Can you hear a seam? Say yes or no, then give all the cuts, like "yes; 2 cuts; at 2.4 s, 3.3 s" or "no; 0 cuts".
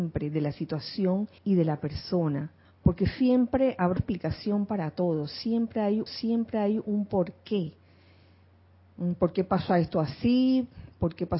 yes; 4 cuts; at 1.4 s, 2.6 s, 4.0 s, 6.1 s